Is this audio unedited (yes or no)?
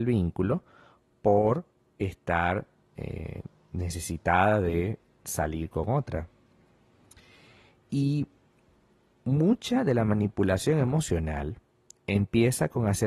yes